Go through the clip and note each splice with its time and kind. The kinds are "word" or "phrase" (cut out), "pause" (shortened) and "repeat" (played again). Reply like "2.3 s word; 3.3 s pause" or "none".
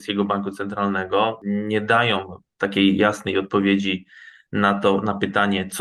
none